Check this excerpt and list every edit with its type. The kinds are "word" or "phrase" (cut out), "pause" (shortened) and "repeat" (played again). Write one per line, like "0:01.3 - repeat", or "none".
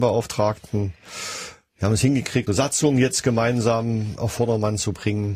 0:02.5 - word
0:04.2 - word

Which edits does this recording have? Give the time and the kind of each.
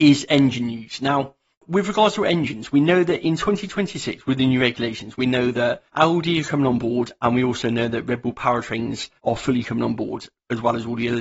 0:01.5 - pause
0:05.9 - pause
0:09.2 - pause

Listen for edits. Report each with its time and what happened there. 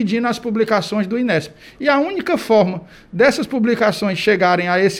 none

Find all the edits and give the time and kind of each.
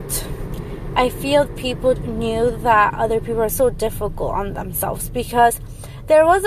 0:01.5 - word
0:02.0 - word
0:03.5 - phrase

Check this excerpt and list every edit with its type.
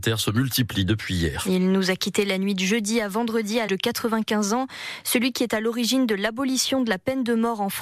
0:03.7 - word

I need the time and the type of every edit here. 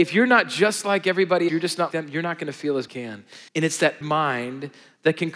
0:01.5 - word
0:01.9 - word
0:02.9 - phrase
0:03.5 - pause
0:04.0 - word

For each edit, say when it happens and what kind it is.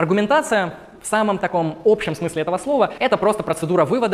0:03.0 - word

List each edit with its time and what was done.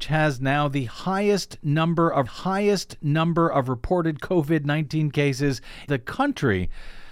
0:02.3 - repeat
0:05.9 - word

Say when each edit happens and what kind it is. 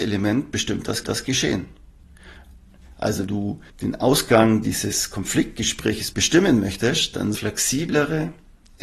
0:01.0 - repeat
0:03.3 - word
0:03.7 - pause
0:06.1 - word
0:07.3 - phrase

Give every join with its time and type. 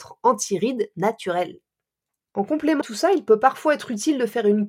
0:02.8 - word

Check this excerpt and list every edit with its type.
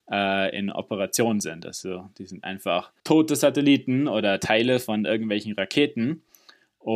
0:03.0 - pause

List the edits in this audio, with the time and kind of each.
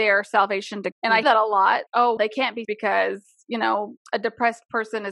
0:00.9 - word
0:01.2 - word
0:01.9 - word
0:02.2 - word
0:02.6 - word
0:04.0 - word

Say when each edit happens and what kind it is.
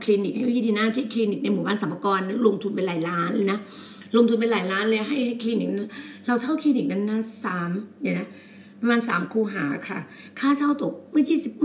none

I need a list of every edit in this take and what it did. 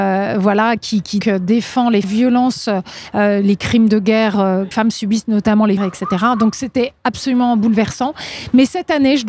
0:01.2 - word
0:02.0 - phrase
0:04.7 - phrase
0:05.8 - phrase

